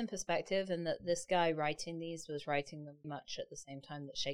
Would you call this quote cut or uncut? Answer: cut